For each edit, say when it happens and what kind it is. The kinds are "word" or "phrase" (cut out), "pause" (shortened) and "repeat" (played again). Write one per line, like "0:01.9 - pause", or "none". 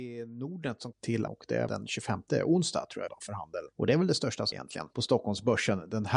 0:00.9 - word
0:01.3 - word
0:01.7 - word
0:03.1 - word
0:04.5 - word